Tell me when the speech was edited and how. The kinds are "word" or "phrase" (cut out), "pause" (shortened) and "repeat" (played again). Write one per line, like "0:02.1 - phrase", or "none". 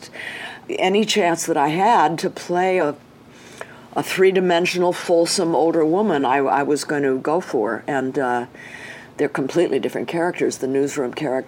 none